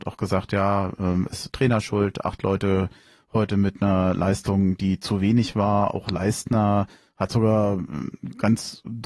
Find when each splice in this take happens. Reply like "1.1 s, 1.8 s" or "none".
none